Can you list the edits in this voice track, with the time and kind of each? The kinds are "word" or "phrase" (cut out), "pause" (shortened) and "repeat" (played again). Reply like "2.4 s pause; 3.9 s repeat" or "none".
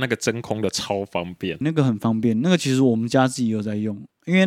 1.6 s word

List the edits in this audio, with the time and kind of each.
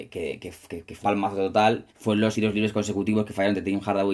1.0 s word; 1.9 s pause; 2.3 s word

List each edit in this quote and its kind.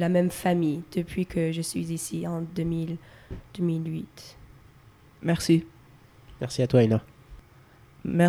none

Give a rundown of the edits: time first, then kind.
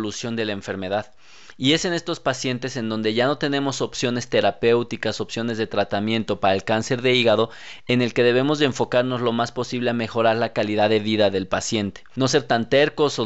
none

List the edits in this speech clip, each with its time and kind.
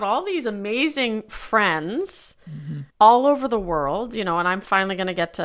2.9 s pause

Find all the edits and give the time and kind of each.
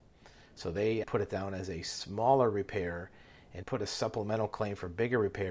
1.0 s word; 3.6 s word

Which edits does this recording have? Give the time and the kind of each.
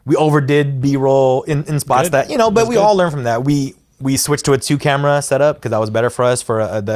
none

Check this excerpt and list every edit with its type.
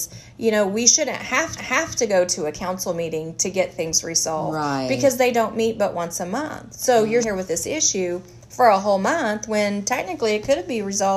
1.6 s repeat; 7.2 s word

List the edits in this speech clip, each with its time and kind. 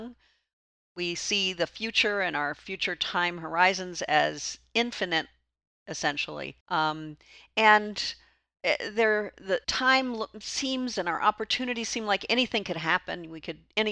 6.6 s pause; 9.6 s pause

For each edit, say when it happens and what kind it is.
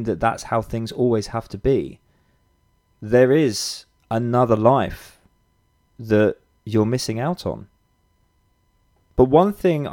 none

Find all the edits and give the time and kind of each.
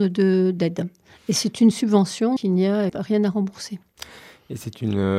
2.4 s word; 2.9 s word

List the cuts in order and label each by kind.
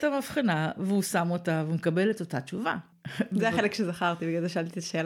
none

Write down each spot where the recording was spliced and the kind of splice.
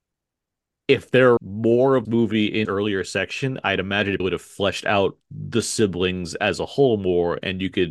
1.4 s word; 2.0 s word; 2.6 s word; 4.2 s word; 5.2 s pause

